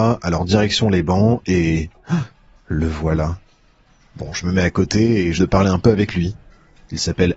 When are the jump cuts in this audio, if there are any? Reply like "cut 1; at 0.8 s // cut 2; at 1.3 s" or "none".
cut 1; at 5.4 s